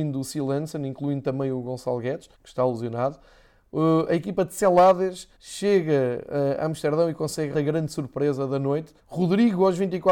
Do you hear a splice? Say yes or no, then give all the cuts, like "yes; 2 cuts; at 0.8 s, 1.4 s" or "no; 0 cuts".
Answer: yes; 4 cuts; at 2.3 s, 5.3 s, 7.5 s, 9.0 s